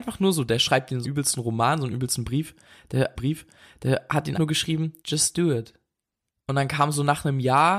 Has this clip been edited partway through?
yes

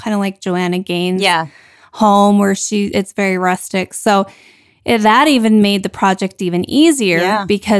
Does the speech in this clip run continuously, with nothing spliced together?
yes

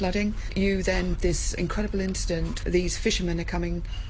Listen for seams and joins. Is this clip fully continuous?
no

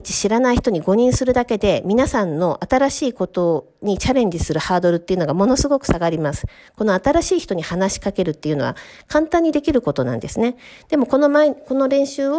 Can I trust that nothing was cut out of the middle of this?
yes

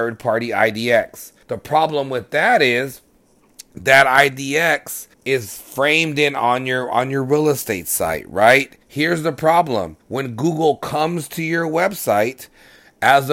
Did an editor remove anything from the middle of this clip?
yes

